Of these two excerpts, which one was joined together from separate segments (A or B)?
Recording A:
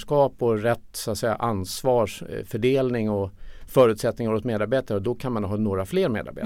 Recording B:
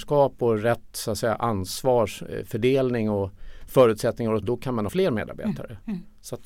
B